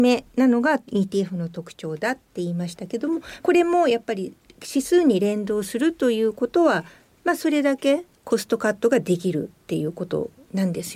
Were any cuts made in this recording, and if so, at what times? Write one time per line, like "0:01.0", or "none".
none